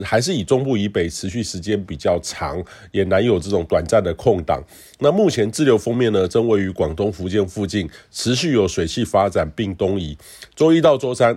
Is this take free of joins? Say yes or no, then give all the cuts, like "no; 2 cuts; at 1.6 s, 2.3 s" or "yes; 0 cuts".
yes; 0 cuts